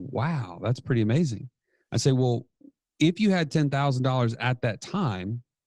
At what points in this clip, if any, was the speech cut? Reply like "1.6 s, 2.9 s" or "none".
none